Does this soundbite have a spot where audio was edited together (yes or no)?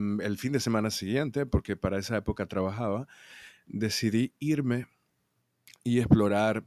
no